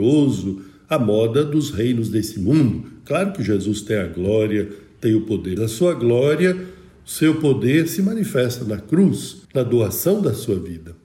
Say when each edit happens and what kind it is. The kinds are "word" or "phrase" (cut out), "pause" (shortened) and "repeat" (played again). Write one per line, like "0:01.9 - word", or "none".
0:05.6 - word
0:09.4 - pause

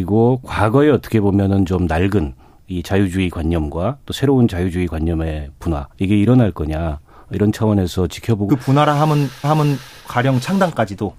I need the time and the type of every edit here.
0:05.9 - pause
0:08.5 - word
0:09.4 - repeat

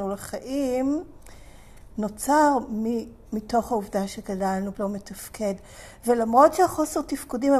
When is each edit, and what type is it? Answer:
0:04.7 - word

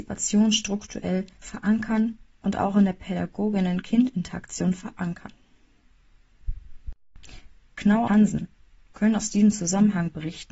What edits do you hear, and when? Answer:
0:01.4 - word
0:08.1 - word

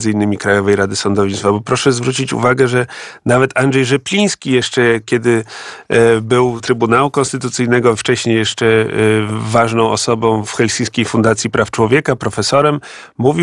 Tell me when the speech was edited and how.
0:06.6 - word

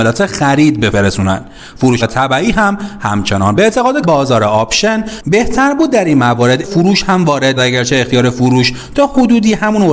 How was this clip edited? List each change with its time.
0:00.9 - word
0:02.0 - word
0:03.5 - word
0:04.0 - word
0:06.6 - word
0:07.6 - word

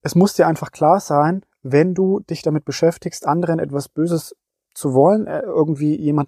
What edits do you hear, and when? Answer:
none

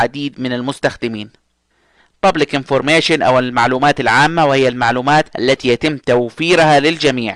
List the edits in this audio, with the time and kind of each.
0:05.3 - pause

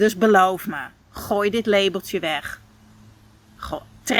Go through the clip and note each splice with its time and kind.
none

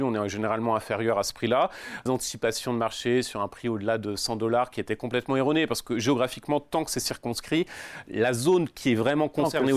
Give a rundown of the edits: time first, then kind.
0:02.1 - phrase

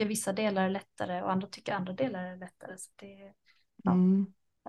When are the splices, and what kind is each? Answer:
none

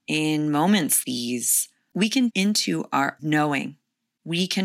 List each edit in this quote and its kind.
0:01.0 - word
0:02.3 - word
0:03.2 - word

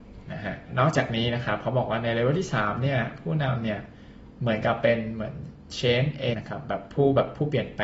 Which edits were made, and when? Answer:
0:06.3 - word

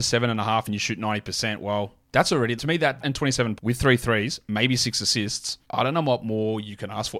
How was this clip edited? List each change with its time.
0:02.0 - pause
0:02.6 - word
0:03.0 - phrase
0:03.6 - word
0:05.6 - pause

